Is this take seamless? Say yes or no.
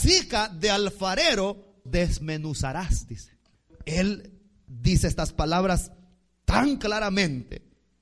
no